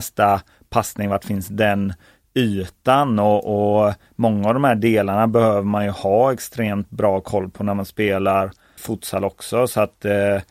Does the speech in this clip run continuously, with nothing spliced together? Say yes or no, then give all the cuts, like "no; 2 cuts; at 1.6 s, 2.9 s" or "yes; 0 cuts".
no; 1 cut; at 8.8 s